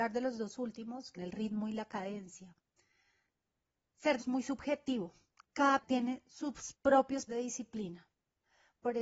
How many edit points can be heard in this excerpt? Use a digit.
4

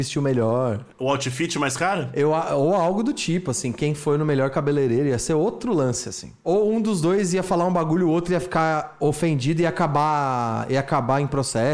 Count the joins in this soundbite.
0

